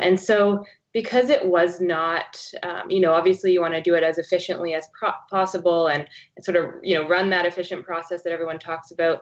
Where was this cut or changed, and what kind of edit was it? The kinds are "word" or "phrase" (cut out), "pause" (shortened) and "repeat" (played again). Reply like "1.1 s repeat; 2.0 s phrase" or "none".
none